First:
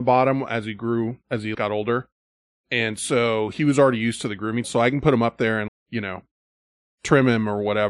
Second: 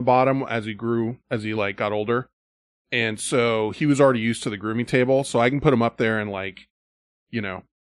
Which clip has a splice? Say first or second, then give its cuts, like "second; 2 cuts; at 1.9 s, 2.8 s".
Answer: first; 3 cuts; at 1.5 s, 4.6 s, 5.7 s